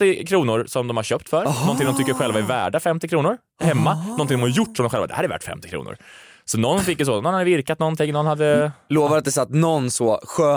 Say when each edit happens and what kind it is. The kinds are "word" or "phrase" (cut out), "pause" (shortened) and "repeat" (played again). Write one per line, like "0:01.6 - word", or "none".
none